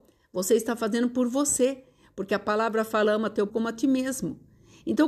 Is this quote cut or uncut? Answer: cut